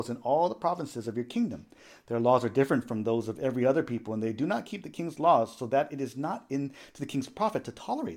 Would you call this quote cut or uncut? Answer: uncut